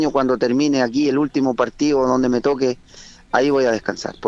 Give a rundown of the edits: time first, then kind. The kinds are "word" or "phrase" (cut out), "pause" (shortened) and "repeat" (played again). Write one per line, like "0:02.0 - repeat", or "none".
none

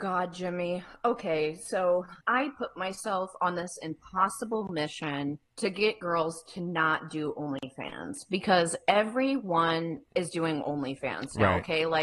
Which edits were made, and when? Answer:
0:02.2 - pause
0:05.5 - pause

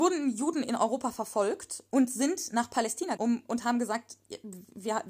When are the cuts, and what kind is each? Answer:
0:03.2 - word

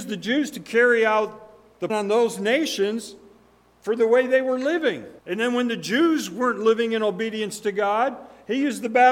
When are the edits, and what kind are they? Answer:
0:01.9 - word
0:05.2 - pause

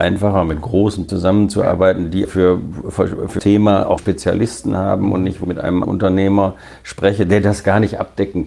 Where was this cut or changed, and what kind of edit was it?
0:01.1 - phrase
0:02.2 - word
0:03.4 - word
0:04.0 - word
0:05.4 - word
0:05.8 - word

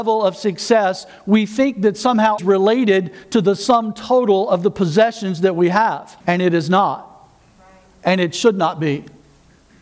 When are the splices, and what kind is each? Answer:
0:02.4 - phrase
0:06.2 - pause

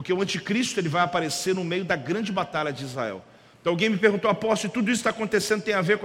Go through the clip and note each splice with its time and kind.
none

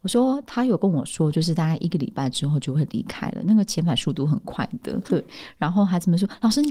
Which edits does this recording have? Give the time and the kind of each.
0:05.1 - word

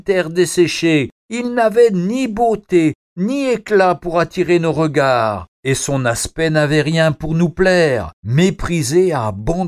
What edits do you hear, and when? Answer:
0:01.2 - pause
0:05.5 - pause
0:08.2 - pause

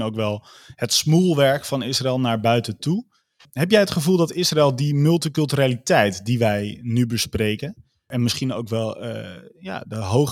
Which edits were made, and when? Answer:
none

